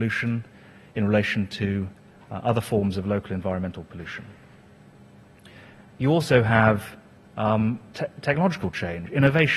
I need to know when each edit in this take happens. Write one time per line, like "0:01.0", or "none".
0:07.9